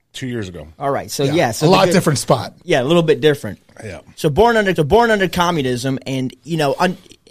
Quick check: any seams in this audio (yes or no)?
yes